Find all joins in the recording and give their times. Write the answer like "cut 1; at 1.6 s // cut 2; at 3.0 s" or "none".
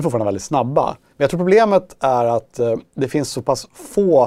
none